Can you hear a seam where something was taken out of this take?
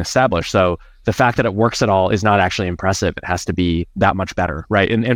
no; 0 cuts

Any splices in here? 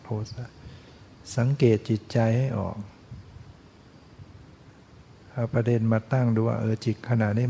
no; 0 cuts

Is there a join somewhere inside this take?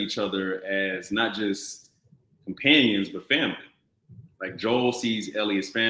no; 0 cuts

